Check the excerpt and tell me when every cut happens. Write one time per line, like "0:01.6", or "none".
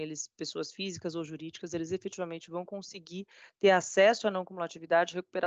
none